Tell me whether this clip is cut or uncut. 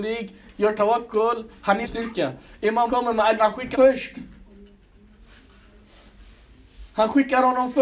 cut